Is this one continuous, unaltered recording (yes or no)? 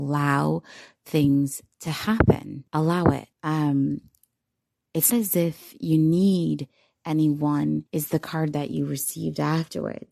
no